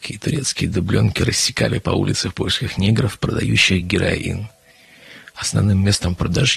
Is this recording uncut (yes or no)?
yes